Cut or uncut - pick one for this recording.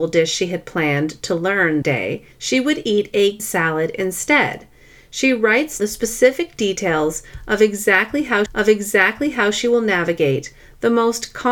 cut